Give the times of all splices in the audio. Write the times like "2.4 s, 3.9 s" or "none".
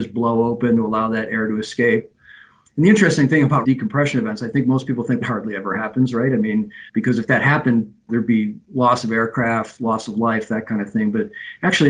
3.6 s, 5.2 s, 6.9 s, 8.1 s